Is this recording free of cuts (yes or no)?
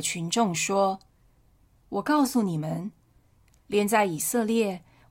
no